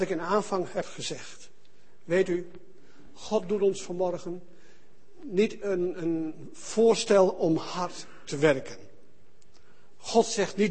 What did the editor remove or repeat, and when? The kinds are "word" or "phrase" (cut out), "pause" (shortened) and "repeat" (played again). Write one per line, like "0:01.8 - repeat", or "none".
none